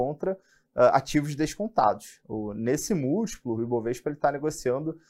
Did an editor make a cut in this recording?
no; 0 cuts

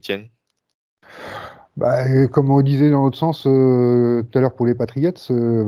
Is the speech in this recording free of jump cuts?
yes; 0 cuts

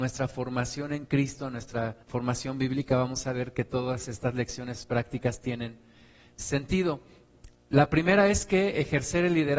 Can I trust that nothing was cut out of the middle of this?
no; 1 cut; at 2.0 s

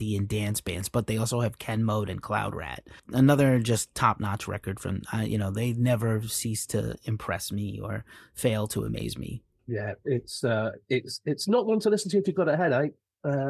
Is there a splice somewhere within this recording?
no; 0 cuts

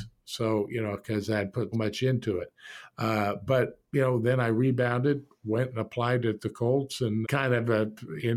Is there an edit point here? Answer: yes; 2 cuts; at 1.7 s, 7.2 s

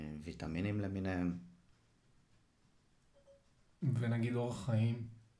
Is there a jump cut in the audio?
no; 0 cuts

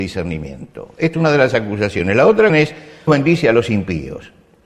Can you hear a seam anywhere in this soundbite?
yes; 3 cuts; at 1.1 s, 2.5 s, 3.1 s

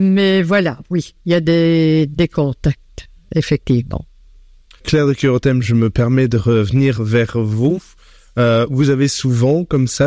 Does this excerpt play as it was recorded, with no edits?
yes; 0 cuts

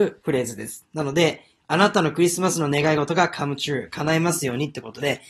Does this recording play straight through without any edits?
yes; 0 cuts

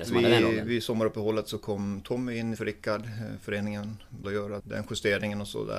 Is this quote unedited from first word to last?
no; 3 cuts; at 2.6 s, 4.2 s, 4.6 s

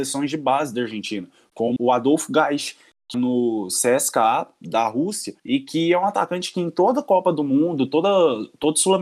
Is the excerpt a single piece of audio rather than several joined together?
no; 3 cuts; at 1.8 s, 3.1 s, 5.4 s

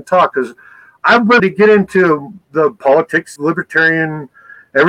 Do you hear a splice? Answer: yes; 2 cuts; at 1.4 s, 3.4 s

